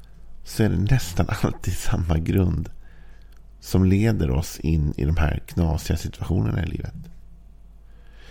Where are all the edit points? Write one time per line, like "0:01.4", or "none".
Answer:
none